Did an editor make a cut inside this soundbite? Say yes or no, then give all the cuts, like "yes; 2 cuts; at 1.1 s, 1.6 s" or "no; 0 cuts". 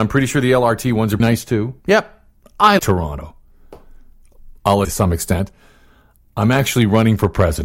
yes; 4 cuts; at 1.2 s, 1.8 s, 2.8 s, 4.8 s